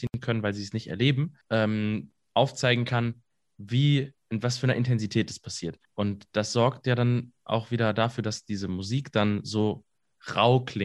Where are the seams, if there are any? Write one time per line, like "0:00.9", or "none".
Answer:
0:01.4
0:04.2
0:05.8